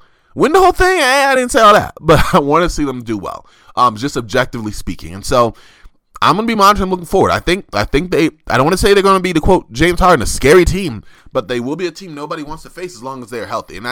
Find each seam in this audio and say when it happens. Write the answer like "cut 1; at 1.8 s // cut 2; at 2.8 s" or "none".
none